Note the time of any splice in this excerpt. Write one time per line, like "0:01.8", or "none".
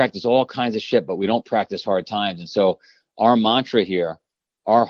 none